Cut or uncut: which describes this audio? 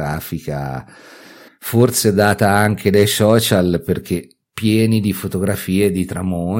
cut